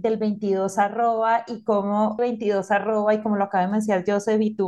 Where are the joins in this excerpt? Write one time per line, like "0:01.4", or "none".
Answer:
0:02.2

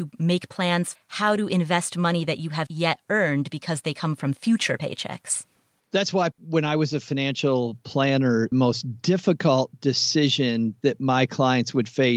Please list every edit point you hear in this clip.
0:00.9
0:02.7
0:06.3
0:08.5

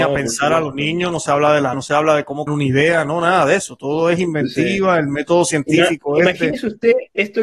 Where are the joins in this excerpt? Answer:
0:01.7
0:02.5

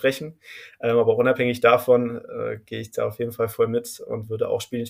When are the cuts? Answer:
none

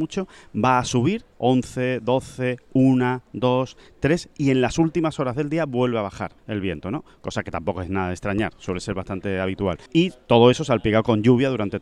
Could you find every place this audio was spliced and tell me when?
0:01.3
0:06.4
0:09.9

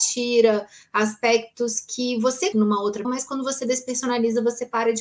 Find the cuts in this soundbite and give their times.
0:02.5
0:03.0

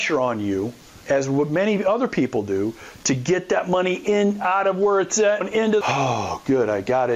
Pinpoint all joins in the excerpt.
0:01.0
0:05.4
0:05.8

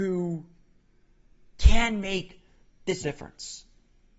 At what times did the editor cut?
0:03.0

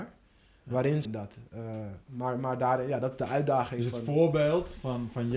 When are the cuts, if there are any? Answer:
0:01.0
0:02.0

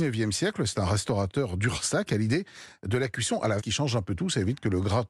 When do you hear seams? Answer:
0:03.6

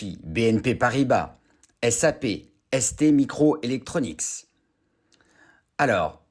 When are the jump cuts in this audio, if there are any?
none

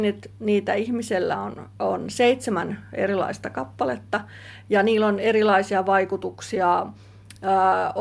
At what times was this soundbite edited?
none

